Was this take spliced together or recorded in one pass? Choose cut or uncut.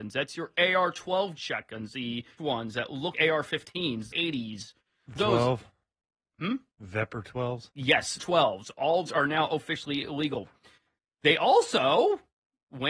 cut